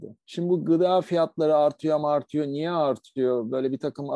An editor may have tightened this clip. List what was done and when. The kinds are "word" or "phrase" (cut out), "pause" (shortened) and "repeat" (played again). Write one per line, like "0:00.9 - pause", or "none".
none